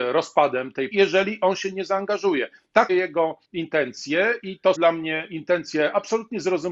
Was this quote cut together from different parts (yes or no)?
yes